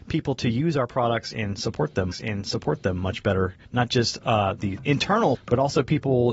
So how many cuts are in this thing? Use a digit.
3